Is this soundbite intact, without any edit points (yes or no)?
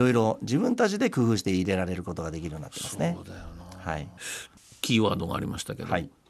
yes